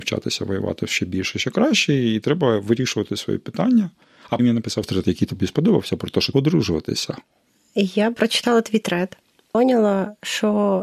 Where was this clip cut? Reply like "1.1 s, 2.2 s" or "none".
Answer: 4.4 s, 6.3 s, 8.1 s